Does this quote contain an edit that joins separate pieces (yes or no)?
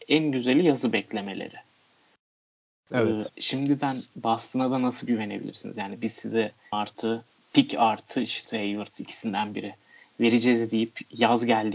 yes